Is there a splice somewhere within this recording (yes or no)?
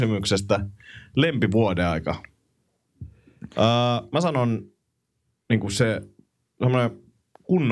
no